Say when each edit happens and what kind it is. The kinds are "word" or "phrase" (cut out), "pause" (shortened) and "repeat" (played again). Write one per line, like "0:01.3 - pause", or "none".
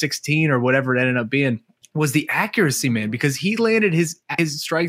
0:01.8 - pause